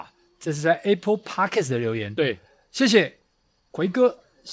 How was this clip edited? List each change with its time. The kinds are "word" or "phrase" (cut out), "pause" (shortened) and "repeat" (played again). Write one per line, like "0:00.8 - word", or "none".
none